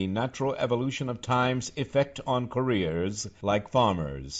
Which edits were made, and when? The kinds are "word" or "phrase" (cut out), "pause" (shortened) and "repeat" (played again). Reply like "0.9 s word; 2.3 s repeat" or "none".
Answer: none